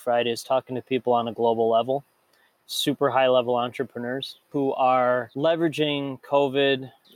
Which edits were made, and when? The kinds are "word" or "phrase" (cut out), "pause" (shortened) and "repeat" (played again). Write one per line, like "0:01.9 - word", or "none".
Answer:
none